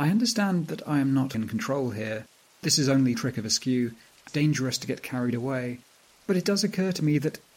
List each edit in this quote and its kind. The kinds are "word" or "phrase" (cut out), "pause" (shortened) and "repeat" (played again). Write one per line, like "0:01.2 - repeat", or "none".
0:01.3 - word
0:02.6 - word
0:03.1 - word
0:04.3 - word